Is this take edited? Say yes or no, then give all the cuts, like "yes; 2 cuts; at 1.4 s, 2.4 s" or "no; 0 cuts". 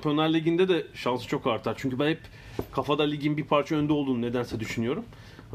no; 0 cuts